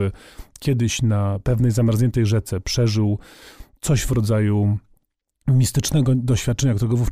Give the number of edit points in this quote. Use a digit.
0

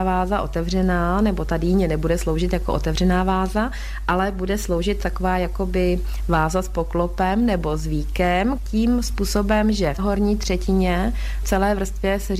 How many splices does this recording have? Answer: 1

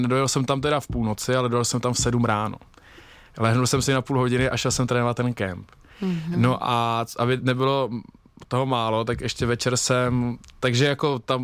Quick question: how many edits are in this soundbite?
0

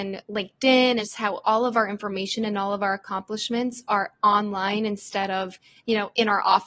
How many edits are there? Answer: 1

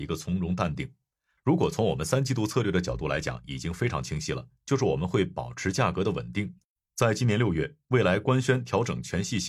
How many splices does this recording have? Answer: 2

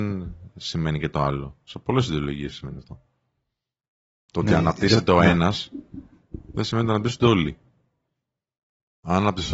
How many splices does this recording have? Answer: 0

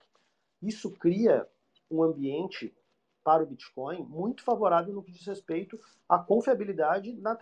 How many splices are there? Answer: 0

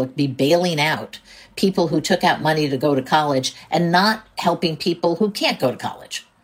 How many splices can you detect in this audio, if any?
0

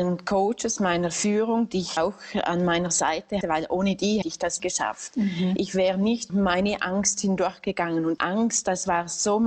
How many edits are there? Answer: 6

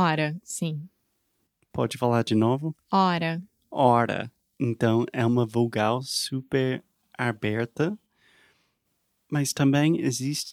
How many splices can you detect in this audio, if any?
0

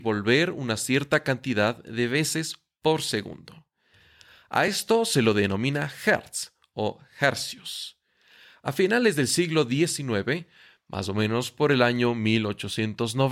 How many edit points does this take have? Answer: 0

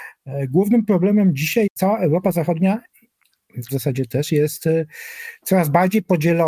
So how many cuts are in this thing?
2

